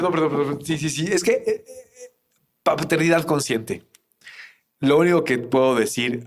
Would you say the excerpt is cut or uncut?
uncut